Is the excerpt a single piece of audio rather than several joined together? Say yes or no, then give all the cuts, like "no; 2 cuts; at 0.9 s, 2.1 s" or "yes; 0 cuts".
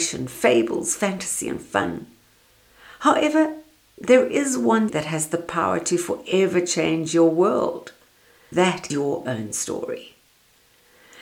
no; 4 cuts; at 4.9 s, 8.5 s, 8.9 s, 9.2 s